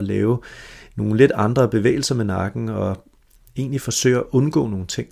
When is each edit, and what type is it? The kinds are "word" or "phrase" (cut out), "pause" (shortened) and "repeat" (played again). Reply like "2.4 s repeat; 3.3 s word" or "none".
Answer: none